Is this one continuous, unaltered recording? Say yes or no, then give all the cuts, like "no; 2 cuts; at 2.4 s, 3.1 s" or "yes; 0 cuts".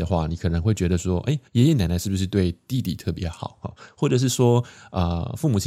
no; 1 cut; at 1.5 s